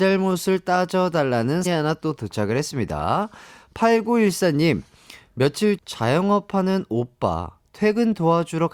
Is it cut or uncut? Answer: cut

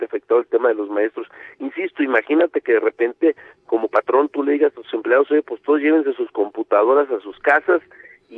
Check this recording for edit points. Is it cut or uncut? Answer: uncut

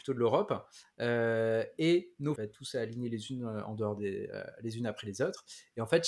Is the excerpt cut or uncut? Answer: cut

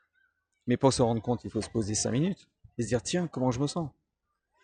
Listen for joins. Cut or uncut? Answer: uncut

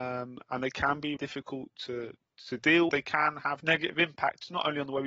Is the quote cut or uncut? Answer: cut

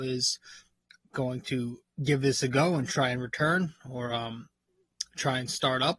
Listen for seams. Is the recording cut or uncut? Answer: uncut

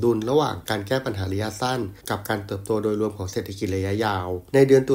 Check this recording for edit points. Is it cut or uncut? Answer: cut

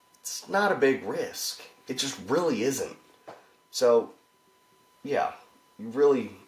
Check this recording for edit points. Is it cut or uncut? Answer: uncut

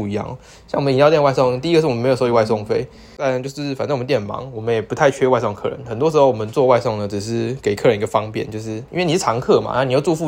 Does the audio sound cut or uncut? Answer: uncut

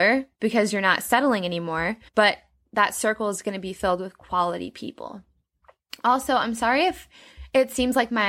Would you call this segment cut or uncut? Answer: cut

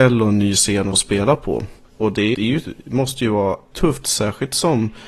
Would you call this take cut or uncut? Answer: cut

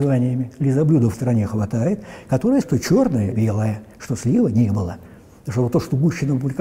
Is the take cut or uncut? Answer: cut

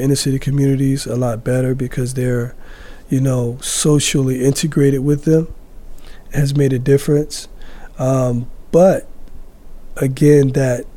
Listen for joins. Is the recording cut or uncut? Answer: uncut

